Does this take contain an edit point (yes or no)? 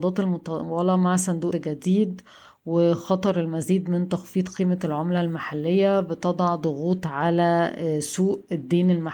yes